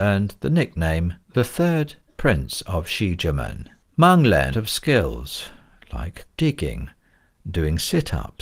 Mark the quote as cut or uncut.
cut